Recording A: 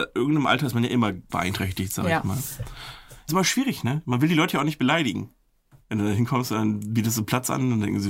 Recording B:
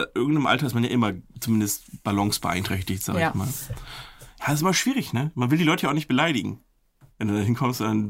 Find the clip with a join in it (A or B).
A